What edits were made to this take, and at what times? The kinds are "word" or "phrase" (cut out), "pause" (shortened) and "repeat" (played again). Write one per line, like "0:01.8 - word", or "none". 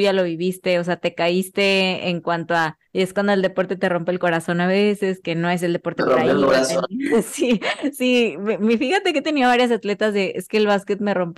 0:02.9 - pause